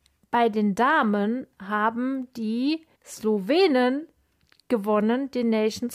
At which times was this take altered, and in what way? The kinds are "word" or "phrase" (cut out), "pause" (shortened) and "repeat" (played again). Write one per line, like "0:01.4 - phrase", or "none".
0:02.9 - pause